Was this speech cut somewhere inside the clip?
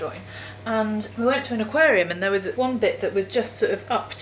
no; 0 cuts

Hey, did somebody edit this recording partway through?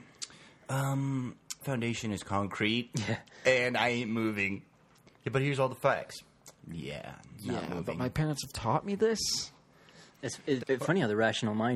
yes; 2 cuts; at 1.6 s, 10.6 s

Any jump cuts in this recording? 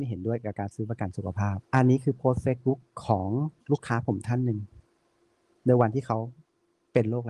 yes; 2 cuts; at 1.6 s, 3.6 s

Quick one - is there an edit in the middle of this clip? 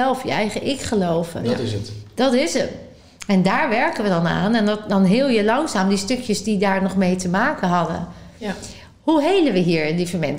no; 0 cuts

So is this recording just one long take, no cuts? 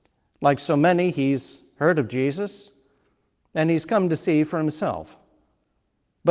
yes; 0 cuts

